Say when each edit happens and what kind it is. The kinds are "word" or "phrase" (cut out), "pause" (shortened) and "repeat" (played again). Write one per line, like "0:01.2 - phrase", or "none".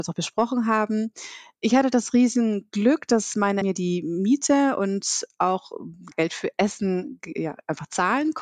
0:03.6 - word
0:06.1 - word